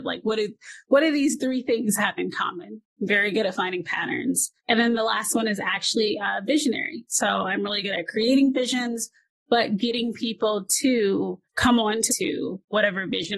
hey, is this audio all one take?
no; 3 cuts; at 4.6 s, 11.4 s, 12.1 s

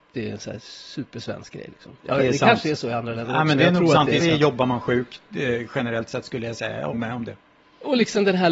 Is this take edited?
yes; 3 cuts; at 2.0 s, 4.2 s, 6.9 s

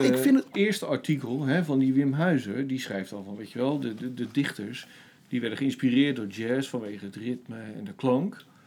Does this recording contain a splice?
no; 0 cuts

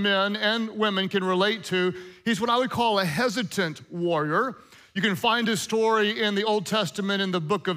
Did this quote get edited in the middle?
no; 0 cuts

